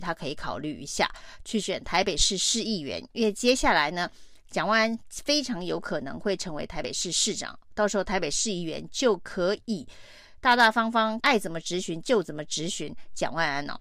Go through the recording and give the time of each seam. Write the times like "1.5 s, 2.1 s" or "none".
11.2 s

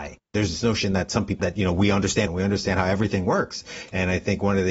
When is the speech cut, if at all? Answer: 1.4 s, 2.3 s

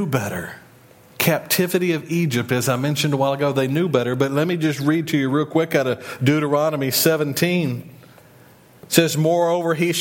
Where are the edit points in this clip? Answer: 0.9 s

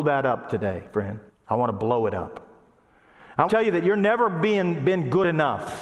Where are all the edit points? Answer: 1.3 s, 3.5 s

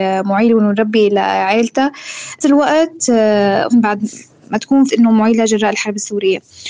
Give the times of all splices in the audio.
2.4 s, 3.7 s, 4.9 s

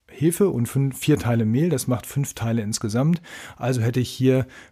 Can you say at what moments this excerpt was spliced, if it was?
none

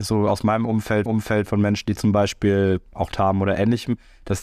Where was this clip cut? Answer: 1.1 s, 3.1 s

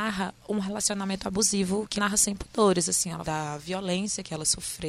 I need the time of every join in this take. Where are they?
2.0 s, 3.2 s

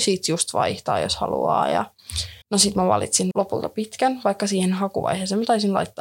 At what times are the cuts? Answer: 2.4 s, 3.3 s

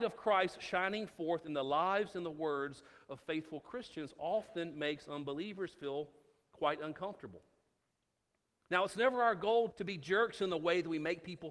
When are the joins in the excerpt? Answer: 9.7 s

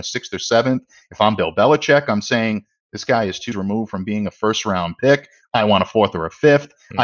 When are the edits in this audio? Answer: 3.5 s

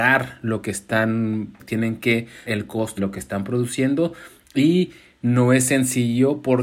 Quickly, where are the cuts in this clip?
1.6 s, 2.5 s, 3.0 s

